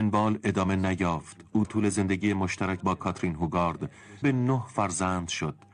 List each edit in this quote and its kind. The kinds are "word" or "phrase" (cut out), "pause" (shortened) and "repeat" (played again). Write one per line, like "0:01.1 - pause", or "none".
0:01.6 - word
0:02.8 - word
0:04.2 - word